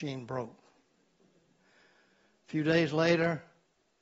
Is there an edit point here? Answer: no; 0 cuts

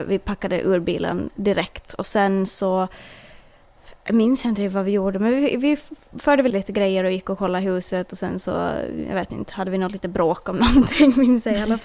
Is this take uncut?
no; 2 cuts; at 4.0 s, 6.5 s

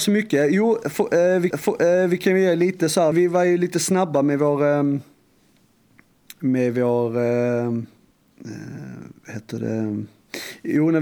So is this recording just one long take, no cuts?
no; 2 cuts; at 1.5 s, 3.1 s

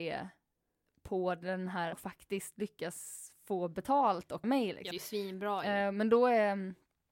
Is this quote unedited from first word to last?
no; 3 cuts; at 1.9 s, 4.4 s, 4.9 s

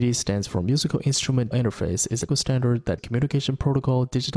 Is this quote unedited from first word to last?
no; 3 cuts; at 1.5 s, 2.3 s, 3.0 s

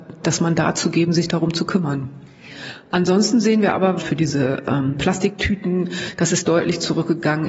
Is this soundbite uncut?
yes; 0 cuts

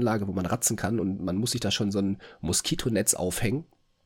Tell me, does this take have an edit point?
no; 0 cuts

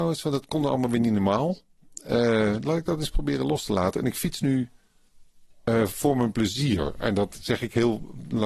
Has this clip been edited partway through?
no; 0 cuts

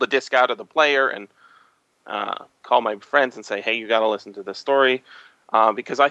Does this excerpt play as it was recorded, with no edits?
yes; 0 cuts

